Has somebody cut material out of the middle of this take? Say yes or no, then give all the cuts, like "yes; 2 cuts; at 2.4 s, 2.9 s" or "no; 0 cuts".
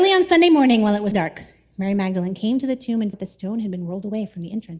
yes; 2 cuts; at 1.1 s, 3.1 s